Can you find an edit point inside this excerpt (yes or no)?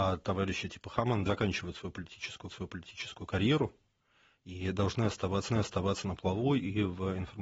yes